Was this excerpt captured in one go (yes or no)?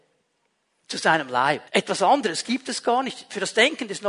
no